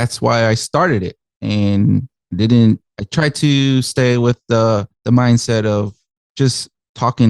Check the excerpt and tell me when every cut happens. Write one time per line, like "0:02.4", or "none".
0:02.9
0:04.9